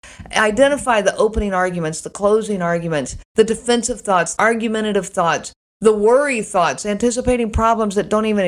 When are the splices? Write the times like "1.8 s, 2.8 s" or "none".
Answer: 3.2 s, 4.4 s